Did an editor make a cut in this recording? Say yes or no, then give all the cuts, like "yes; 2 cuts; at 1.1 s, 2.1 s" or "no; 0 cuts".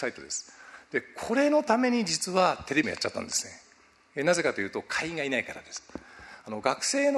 yes; 1 cut; at 2.8 s